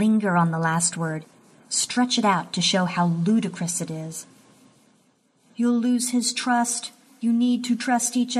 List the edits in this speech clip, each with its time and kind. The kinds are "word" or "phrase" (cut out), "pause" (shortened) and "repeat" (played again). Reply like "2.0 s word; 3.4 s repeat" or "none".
none